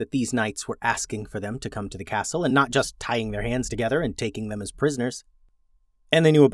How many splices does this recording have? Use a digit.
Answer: 0